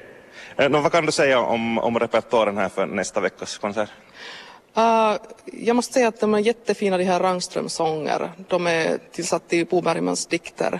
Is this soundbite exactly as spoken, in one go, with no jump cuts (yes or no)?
no